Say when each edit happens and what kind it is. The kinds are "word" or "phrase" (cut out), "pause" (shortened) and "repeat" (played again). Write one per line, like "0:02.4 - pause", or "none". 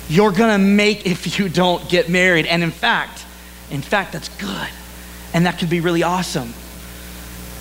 0:01.0 - word